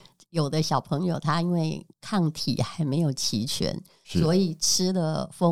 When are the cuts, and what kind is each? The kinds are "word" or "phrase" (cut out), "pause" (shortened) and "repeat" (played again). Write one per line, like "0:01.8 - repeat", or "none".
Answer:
0:01.9 - pause